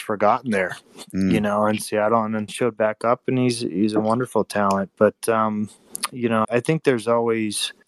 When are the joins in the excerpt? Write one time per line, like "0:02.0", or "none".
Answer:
0:02.5
0:06.4